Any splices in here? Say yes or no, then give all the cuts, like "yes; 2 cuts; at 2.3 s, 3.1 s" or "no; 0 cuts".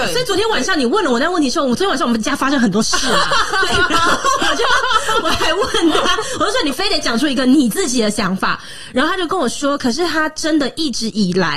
no; 0 cuts